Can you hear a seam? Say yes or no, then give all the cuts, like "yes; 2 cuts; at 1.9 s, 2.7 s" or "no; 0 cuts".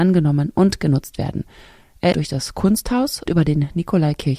yes; 2 cuts; at 2.1 s, 3.3 s